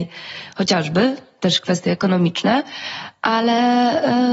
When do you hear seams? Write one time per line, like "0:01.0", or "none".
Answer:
none